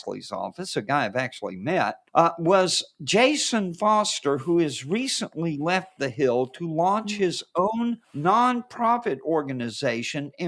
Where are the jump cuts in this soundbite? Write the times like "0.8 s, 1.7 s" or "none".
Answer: 2.1 s, 8.0 s